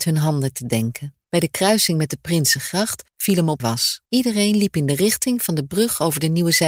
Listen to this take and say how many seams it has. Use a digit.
4